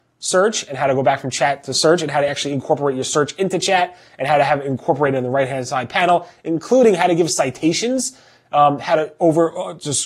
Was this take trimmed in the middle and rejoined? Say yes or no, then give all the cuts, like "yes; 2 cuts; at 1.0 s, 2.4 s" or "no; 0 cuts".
no; 0 cuts